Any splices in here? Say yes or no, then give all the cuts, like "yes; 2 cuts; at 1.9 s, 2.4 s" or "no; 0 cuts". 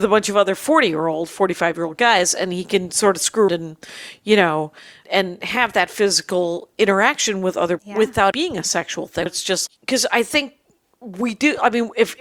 yes; 6 cuts; at 3.5 s, 5.0 s, 7.8 s, 8.3 s, 9.3 s, 9.7 s